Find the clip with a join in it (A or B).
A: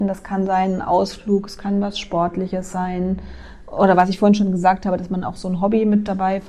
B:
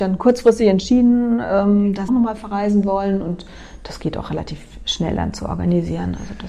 B